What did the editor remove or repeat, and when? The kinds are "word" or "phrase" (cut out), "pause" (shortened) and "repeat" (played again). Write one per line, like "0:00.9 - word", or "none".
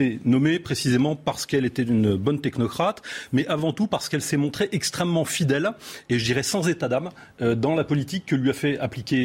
none

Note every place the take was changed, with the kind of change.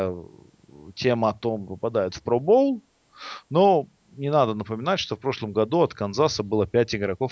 0:01.7 - phrase

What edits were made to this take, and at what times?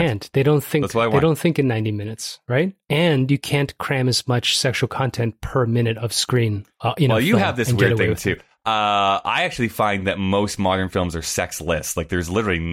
none

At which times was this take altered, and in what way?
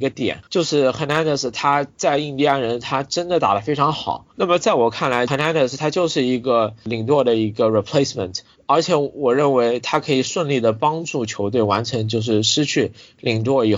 0:04.3 - pause

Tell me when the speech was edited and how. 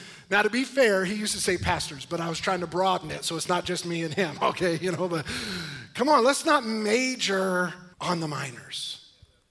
0:07.9 - pause

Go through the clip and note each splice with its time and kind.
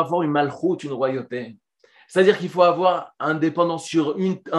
none

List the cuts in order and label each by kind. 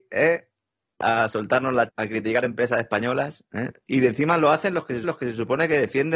0:01.9 - word
0:05.0 - repeat

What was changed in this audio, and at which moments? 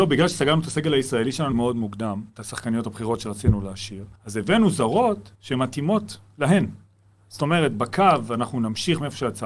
0:01.5 - word
0:02.3 - pause
0:04.2 - pause
0:05.3 - pause

